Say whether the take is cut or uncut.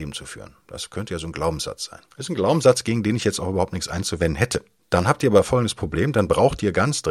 cut